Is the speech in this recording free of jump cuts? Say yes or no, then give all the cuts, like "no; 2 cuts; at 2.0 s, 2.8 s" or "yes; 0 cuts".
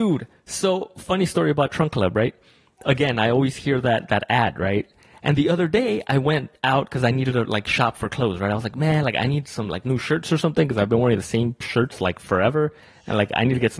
yes; 0 cuts